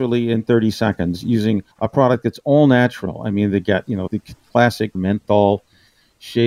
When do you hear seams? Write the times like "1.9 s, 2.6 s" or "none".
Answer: 1.7 s, 4.1 s, 4.9 s